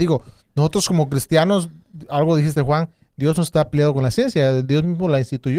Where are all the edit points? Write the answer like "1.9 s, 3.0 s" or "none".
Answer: none